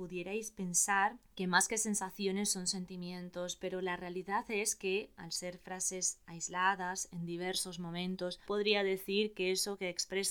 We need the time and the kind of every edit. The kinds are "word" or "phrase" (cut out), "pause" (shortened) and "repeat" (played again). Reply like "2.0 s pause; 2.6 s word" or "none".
8.5 s word